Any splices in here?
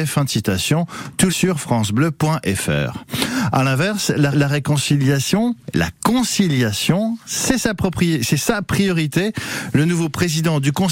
yes; 2 cuts; at 1.3 s, 4.3 s

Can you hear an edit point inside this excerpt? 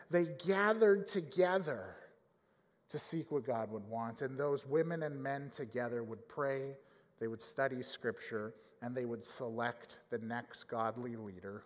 no; 0 cuts

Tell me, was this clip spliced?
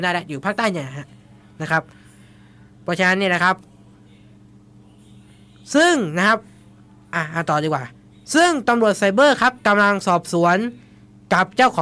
no; 0 cuts

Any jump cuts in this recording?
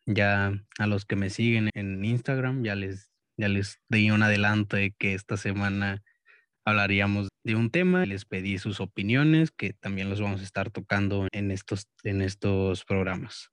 yes; 4 cuts; at 1.7 s, 7.3 s, 8.0 s, 11.3 s

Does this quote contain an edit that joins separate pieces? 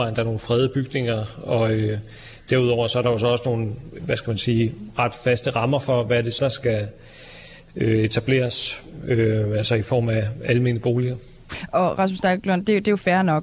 yes; 2 cuts; at 4.0 s, 6.4 s

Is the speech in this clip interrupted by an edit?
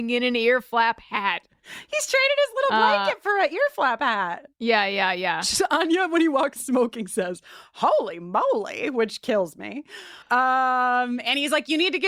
yes; 3 cuts; at 4.5 s, 6.6 s, 10.2 s

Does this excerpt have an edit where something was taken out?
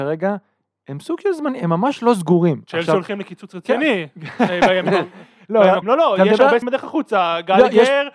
yes; 2 cuts; at 5.8 s, 6.6 s

